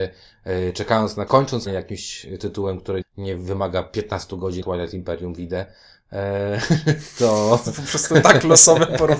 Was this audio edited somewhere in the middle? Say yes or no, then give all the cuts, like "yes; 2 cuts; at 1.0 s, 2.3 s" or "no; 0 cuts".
yes; 4 cuts; at 1.3 s, 1.7 s, 3.0 s, 4.6 s